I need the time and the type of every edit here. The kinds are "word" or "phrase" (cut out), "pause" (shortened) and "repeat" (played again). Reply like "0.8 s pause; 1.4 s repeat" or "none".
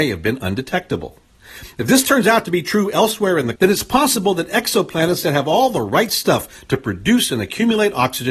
3.6 s word